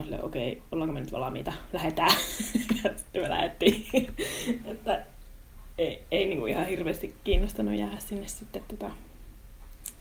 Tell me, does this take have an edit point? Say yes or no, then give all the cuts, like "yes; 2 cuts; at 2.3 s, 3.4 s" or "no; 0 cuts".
no; 0 cuts